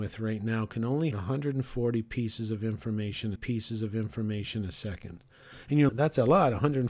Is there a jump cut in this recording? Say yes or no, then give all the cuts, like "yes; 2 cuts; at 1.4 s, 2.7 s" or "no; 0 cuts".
yes; 3 cuts; at 1.1 s, 3.4 s, 5.9 s